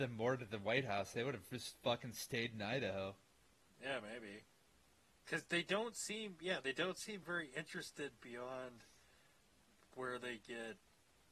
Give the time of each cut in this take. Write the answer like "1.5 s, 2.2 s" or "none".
none